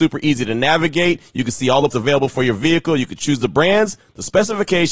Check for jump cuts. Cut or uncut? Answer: cut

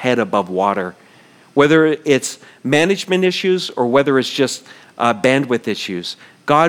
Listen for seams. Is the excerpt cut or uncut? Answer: uncut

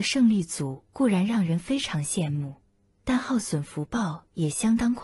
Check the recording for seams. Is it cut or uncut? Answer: uncut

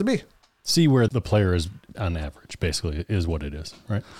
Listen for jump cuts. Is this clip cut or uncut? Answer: cut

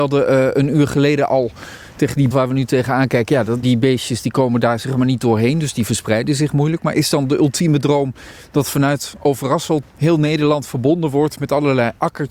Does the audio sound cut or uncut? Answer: cut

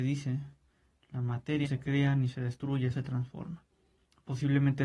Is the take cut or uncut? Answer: cut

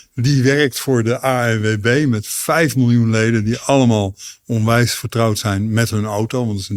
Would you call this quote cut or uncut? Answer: uncut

